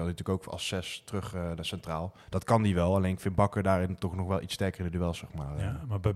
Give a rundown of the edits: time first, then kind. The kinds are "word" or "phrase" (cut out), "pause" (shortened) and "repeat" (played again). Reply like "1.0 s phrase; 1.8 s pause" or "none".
2.2 s pause